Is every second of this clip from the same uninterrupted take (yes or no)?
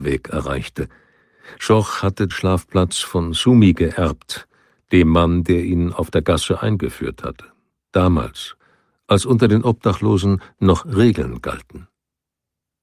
no